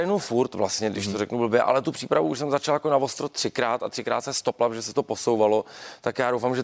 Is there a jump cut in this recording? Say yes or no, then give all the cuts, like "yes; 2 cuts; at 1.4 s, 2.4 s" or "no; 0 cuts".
no; 0 cuts